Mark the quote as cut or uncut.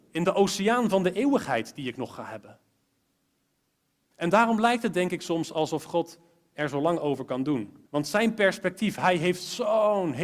cut